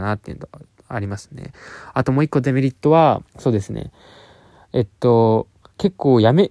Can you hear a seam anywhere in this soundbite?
yes; 1 cut; at 3.3 s

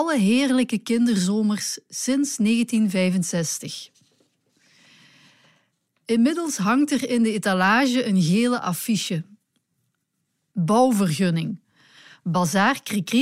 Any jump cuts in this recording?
no; 0 cuts

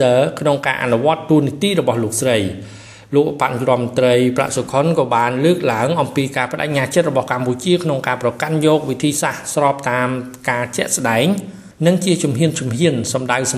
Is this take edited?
no; 0 cuts

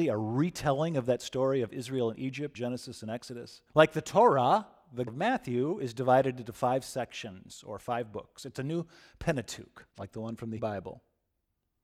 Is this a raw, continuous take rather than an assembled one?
no; 5 cuts; at 2.5 s, 3.7 s, 5.1 s, 9.9 s, 10.6 s

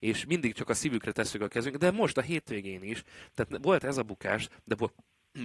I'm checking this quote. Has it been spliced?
no; 0 cuts

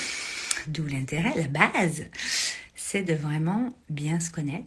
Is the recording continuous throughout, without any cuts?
yes; 0 cuts

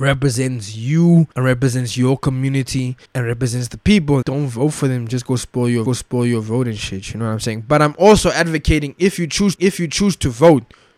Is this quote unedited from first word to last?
no; 5 cuts; at 1.3 s, 3.1 s, 4.2 s, 5.9 s, 9.6 s

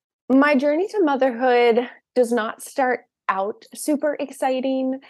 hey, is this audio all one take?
yes; 0 cuts

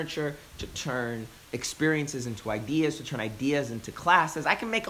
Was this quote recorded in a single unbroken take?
no; 1 cut; at 1.4 s

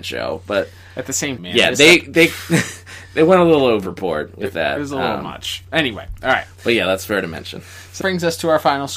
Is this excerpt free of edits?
no; 2 cuts; at 1.4 s, 8.0 s

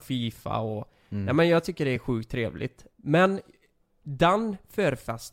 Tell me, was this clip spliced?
no; 0 cuts

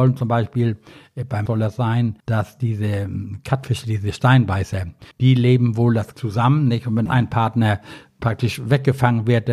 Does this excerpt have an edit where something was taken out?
yes; 5 cuts; at 1.5 s, 2.2 s, 5.1 s, 6.1 s, 7.1 s

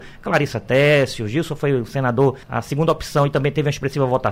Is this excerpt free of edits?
no; 1 cut; at 2.4 s

